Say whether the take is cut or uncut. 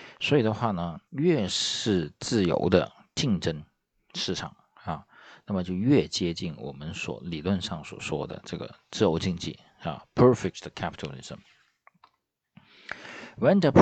cut